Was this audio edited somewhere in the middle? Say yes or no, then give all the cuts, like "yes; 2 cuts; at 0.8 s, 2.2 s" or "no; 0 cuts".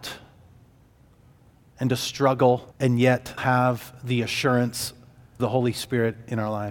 yes; 3 cuts; at 2.7 s, 3.4 s, 5.4 s